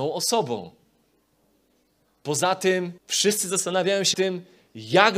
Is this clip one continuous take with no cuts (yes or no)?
no